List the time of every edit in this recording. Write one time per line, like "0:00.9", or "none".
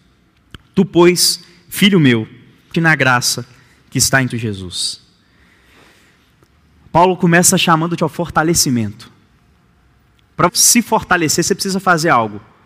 0:02.7
0:04.3
0:08.0
0:10.5

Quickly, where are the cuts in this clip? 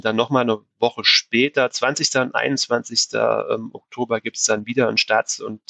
none

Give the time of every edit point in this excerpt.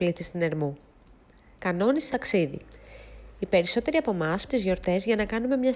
0:02.1
0:04.5

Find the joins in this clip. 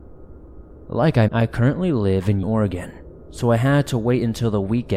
0:01.3
0:02.4

